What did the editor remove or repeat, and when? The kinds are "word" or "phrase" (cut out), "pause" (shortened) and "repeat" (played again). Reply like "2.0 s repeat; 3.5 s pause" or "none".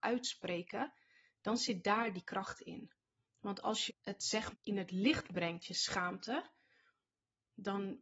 3.9 s word; 4.5 s word

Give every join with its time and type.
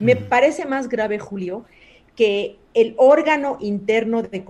none

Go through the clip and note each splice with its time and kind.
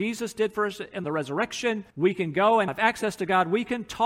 1.0 s phrase; 1.9 s pause; 2.7 s word

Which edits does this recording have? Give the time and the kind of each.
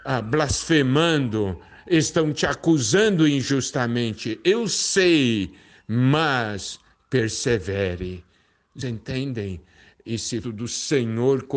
8.8 s word; 10.4 s word

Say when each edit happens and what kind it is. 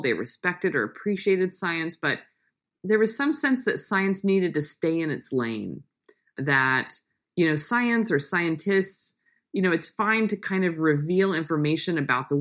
none

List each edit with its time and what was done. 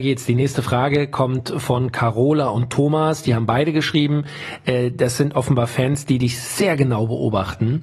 none

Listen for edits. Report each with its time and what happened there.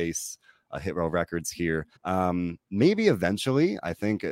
2.0 s pause

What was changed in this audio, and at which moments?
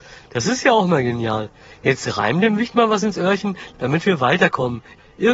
none

